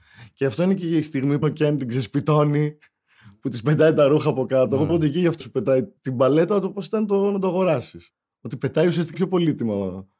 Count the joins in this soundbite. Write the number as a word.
six